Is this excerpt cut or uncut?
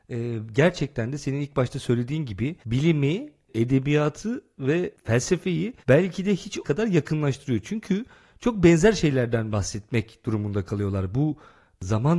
cut